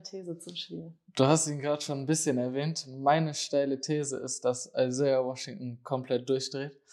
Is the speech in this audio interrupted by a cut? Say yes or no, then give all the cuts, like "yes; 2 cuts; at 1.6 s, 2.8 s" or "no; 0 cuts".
no; 0 cuts